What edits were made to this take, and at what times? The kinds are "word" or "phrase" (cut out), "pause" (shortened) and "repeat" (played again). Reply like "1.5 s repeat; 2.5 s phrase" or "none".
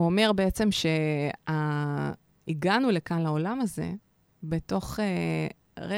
none